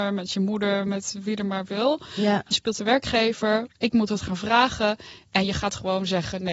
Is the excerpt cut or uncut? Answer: cut